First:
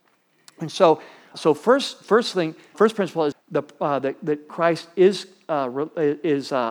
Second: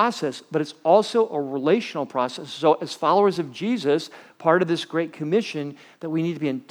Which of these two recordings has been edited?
first; 4 cuts; at 1.3 s, 2.7 s, 3.3 s, 4.5 s

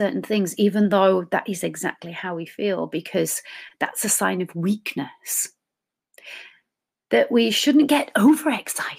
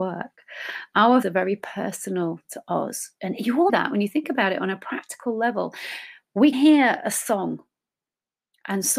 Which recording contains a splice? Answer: second; 3 cuts; at 1.2 s, 3.7 s, 6.5 s

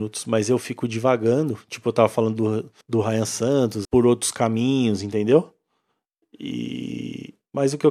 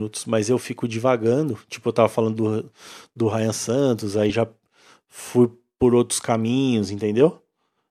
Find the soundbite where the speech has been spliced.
first; 2 cuts; at 2.8 s, 3.8 s

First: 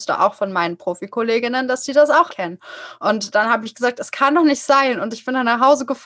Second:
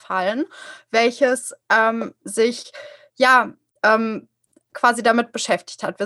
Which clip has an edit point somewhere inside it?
first; 1 cut; at 2.3 s

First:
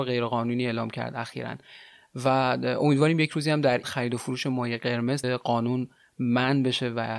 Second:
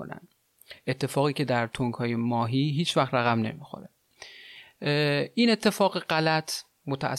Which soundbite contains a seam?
first; 2 cuts; at 3.8 s, 5.2 s

